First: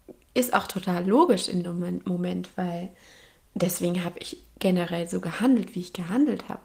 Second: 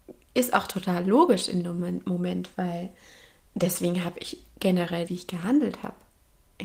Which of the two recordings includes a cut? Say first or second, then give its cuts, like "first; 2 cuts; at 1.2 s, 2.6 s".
second; 1 cut; at 5.1 s